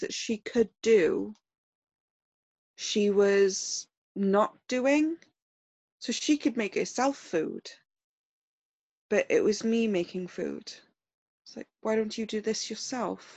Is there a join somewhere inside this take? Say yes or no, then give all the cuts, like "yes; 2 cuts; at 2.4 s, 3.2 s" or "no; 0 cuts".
no; 0 cuts